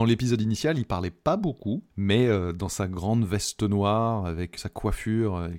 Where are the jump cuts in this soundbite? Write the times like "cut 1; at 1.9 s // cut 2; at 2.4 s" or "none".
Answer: cut 1; at 1.9 s // cut 2; at 4.6 s